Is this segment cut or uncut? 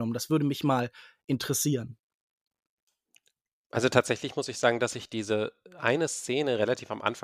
uncut